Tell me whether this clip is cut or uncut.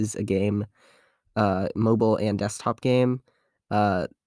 uncut